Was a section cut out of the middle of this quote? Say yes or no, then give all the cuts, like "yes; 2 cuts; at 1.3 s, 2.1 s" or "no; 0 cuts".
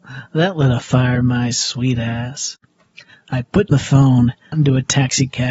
yes; 3 cuts; at 1.2 s, 3.7 s, 4.5 s